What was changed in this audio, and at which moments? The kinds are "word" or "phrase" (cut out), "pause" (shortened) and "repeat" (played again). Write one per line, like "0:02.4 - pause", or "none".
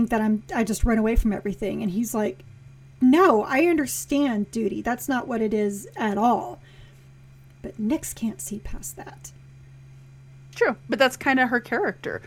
none